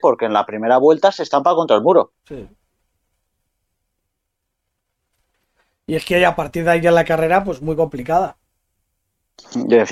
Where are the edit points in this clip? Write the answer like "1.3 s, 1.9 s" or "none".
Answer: 2.2 s